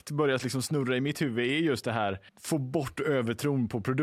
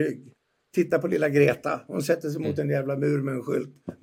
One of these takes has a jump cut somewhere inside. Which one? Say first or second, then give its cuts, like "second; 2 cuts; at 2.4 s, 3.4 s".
first; 1 cut; at 2.3 s